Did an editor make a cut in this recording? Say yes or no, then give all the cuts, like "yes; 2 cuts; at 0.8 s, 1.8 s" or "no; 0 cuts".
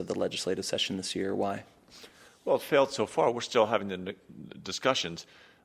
no; 0 cuts